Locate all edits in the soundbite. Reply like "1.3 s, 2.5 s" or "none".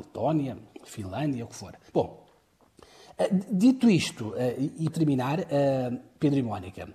1.9 s, 4.9 s